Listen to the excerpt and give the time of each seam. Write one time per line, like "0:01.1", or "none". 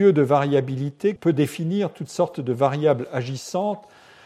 0:01.2